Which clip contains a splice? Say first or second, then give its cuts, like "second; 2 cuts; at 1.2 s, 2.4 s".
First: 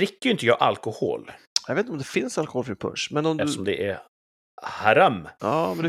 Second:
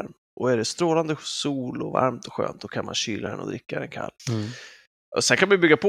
second; 1 cut; at 4.2 s